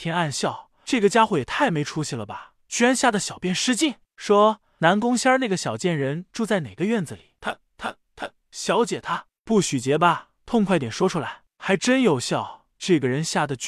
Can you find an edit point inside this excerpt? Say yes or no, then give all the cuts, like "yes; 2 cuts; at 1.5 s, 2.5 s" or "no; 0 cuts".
no; 0 cuts